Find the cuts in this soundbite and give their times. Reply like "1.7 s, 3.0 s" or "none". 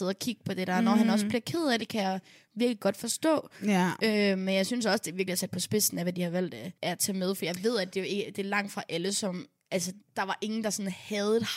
1.8 s, 6.7 s, 10.0 s